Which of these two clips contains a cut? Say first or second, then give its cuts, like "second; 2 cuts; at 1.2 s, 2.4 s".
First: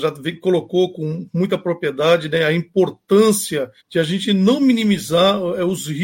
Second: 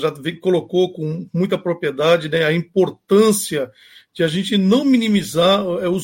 first; 1 cut; at 3.8 s